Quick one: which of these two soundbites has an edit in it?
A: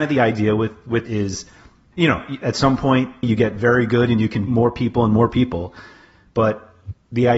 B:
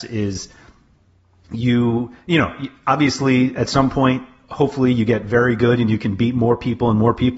A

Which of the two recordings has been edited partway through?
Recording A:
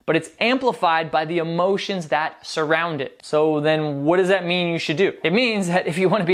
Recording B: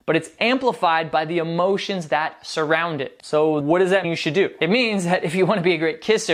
B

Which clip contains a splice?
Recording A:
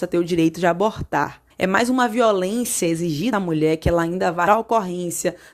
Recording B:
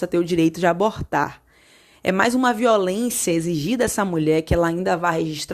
A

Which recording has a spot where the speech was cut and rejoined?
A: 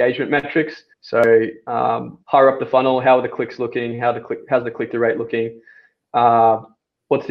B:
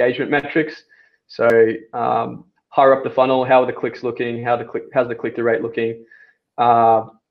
A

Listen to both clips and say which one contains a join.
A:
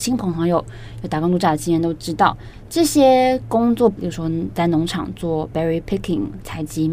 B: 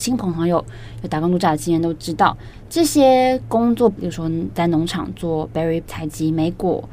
B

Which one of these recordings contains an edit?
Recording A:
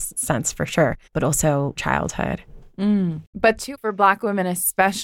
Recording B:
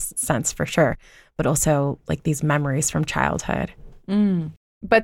A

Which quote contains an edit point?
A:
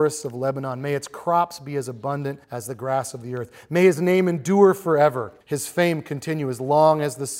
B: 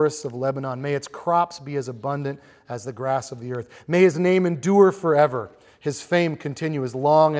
A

